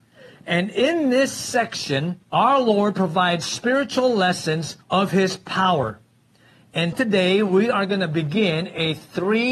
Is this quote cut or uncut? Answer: cut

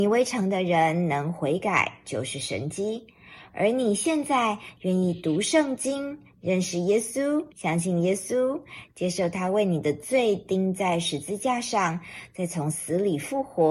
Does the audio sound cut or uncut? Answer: cut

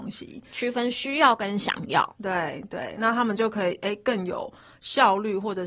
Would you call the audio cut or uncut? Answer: uncut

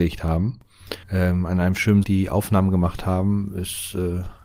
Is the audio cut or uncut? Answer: cut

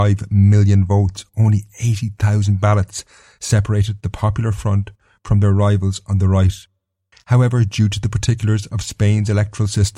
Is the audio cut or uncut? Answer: uncut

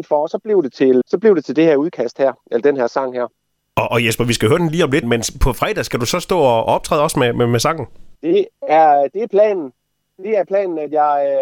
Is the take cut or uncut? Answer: cut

